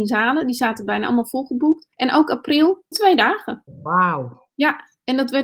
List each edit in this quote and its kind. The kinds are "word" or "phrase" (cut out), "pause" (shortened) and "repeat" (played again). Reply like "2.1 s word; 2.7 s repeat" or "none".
1.9 s pause; 2.9 s phrase